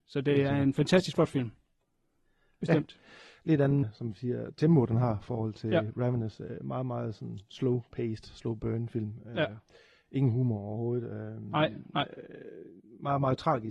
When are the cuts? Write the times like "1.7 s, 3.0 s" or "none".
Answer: 3.8 s